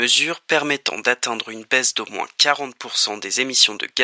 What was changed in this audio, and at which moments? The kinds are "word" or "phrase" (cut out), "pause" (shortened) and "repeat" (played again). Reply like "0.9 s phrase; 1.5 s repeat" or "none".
none

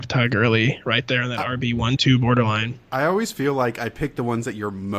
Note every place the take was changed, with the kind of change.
none

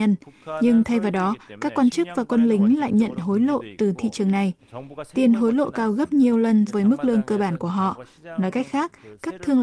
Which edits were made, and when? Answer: 6.7 s word

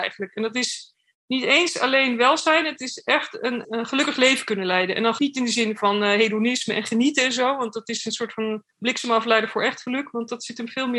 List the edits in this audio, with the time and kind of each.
1.1 s pause; 3.6 s word; 5.2 s word; 8.7 s pause

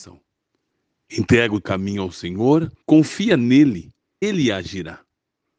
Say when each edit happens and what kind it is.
1.6 s word; 2.8 s pause; 4.2 s word

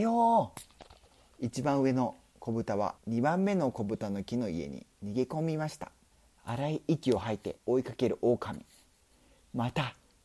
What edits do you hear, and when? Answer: 3.0 s pause; 6.1 s pause; 7.6 s pause

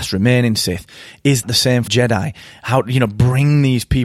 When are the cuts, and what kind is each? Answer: 1.4 s word; 1.9 s word

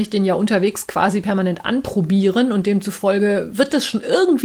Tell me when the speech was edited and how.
none

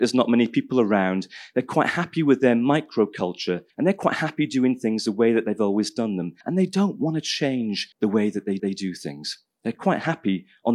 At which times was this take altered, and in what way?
3.7 s pause; 6.4 s pause; 7.9 s pause; 8.6 s repeat

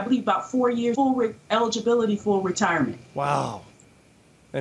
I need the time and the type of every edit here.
0.9 s phrase; 2.2 s word; 3.1 s pause

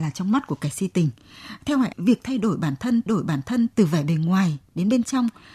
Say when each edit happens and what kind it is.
1.9 s phrase; 3.1 s repeat

